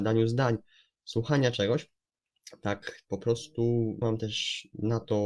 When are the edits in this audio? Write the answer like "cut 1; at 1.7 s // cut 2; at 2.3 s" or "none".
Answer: cut 1; at 3.0 s // cut 2; at 4.0 s